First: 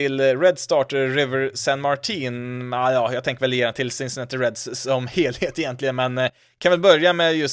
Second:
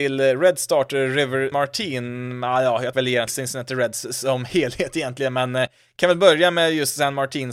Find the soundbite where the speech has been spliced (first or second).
second